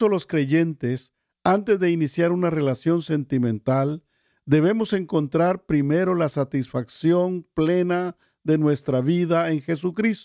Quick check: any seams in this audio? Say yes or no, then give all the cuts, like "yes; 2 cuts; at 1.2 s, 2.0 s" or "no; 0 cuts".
no; 0 cuts